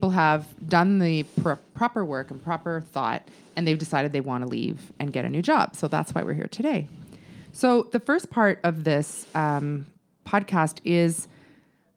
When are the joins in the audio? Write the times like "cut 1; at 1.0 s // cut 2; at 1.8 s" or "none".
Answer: none